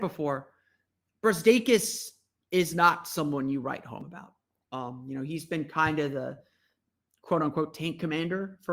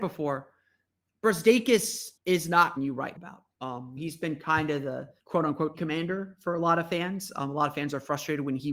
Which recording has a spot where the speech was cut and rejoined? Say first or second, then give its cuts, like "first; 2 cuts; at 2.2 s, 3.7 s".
second; 7 cuts; at 2.2 s, 2.8 s, 3.2 s, 3.5 s, 4.0 s, 5.2 s, 5.7 s